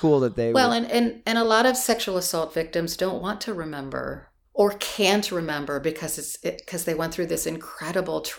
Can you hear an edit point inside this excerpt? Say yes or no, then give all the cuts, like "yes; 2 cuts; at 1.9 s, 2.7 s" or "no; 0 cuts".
yes; 1 cut; at 4.4 s